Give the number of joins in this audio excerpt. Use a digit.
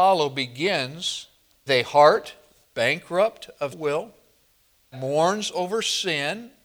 3